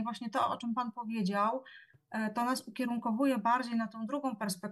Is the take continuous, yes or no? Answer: yes